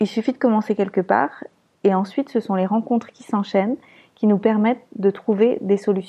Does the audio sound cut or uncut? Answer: uncut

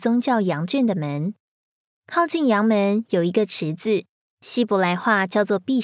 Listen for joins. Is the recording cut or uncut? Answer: uncut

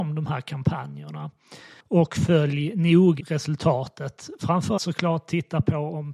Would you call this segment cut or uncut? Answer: cut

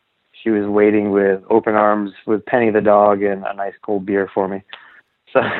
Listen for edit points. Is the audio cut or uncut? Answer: uncut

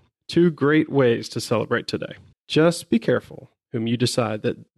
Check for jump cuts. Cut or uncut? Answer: cut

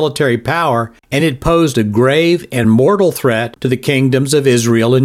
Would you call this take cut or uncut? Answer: uncut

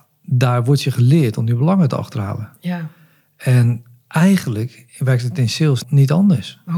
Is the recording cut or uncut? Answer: cut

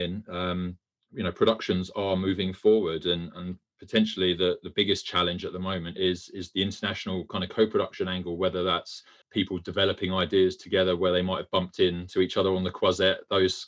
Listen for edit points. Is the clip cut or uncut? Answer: uncut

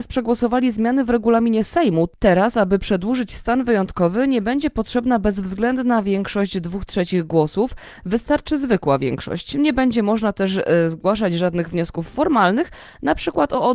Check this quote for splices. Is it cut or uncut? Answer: uncut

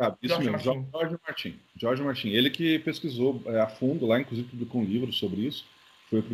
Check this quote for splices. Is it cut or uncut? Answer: cut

